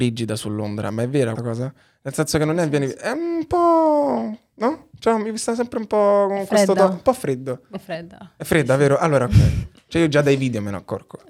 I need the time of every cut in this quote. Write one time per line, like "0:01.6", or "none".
0:01.4